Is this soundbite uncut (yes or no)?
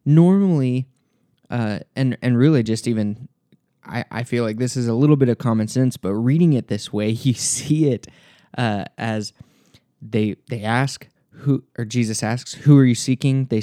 yes